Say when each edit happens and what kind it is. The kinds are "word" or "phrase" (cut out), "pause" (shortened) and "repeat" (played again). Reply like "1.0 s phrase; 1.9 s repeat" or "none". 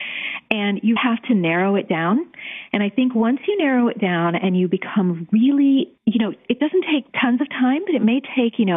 1.0 s word; 6.0 s pause; 7.1 s pause